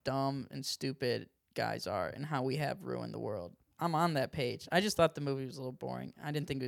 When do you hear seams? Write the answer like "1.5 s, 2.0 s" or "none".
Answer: 3.7 s